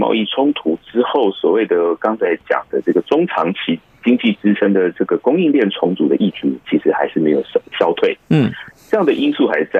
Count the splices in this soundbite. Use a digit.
1